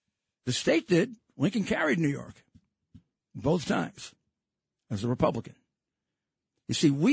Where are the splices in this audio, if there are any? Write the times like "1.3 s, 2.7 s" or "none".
none